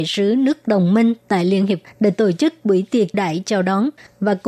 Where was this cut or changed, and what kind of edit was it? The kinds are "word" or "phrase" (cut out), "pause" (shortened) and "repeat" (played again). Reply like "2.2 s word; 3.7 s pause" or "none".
1.8 s word; 3.1 s word